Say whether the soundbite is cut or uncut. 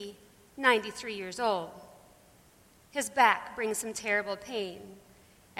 uncut